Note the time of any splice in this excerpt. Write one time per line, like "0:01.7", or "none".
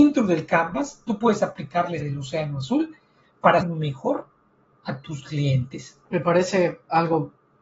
0:02.0
0:03.6
0:06.0